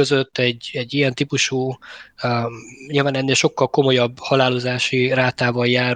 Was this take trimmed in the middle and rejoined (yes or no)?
no